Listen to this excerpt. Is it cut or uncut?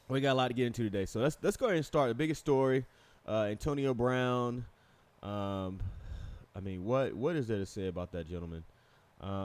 uncut